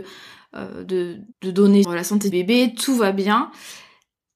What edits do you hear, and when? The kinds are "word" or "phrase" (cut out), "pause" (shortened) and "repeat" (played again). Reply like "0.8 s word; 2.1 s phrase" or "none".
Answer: 1.3 s pause; 1.8 s word; 2.3 s word

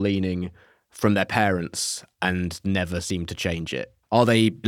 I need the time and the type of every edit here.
none

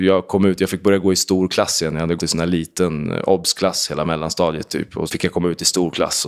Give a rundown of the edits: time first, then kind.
2.2 s word; 5.1 s word

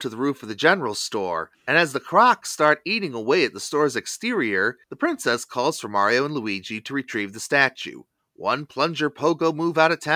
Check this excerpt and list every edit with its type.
1.5 s pause; 4.8 s pause; 8.2 s pause

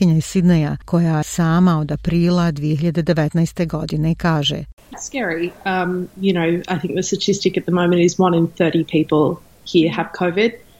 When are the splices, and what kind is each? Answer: 1.2 s phrase; 4.9 s word

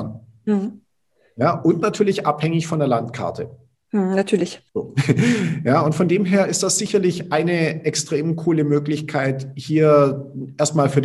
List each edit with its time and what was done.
3.7 s pause; 4.7 s pause

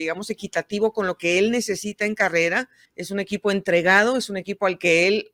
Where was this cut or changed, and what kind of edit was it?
2.9 s pause

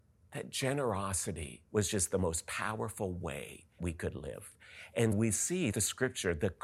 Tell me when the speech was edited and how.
1.7 s pause; 3.8 s word; 5.1 s word; 5.7 s word

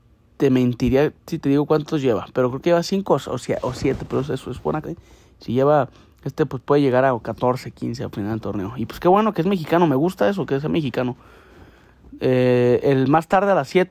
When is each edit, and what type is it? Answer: 1.2 s pause; 4.8 s word

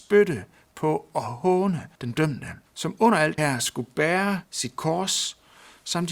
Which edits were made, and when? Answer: 1.9 s pause; 2.7 s pause; 3.4 s word; 4.4 s pause

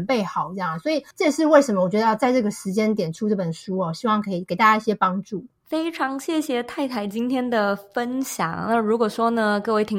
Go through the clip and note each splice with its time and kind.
1.1 s pause

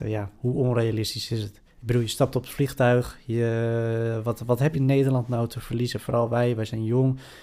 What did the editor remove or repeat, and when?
1.7 s pause; 4.7 s word

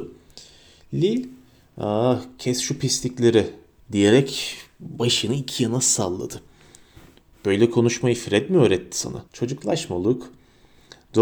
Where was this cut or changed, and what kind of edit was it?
9.3 s pause

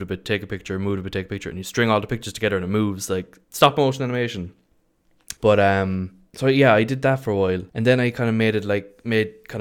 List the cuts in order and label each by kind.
3.4 s pause; 5.4 s pause; 6.3 s pause; 7.7 s pause

